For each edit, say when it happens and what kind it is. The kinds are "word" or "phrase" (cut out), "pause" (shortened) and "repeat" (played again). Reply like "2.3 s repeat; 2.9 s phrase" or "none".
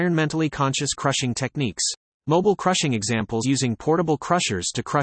2.1 s pause; 3.4 s word